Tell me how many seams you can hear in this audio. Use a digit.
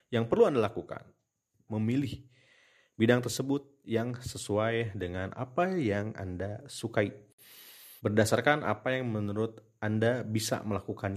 2